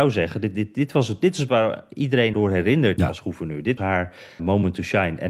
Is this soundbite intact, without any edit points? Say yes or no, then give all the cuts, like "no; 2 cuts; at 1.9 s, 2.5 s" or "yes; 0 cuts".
no; 5 cuts; at 1.5 s, 2.3 s, 3.0 s, 3.8 s, 4.4 s